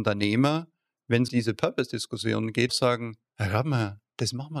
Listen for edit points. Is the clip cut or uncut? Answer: cut